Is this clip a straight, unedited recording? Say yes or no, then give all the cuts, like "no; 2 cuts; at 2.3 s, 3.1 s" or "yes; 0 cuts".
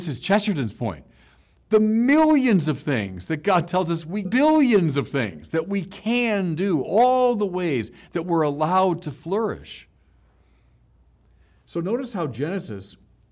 no; 1 cut; at 4.3 s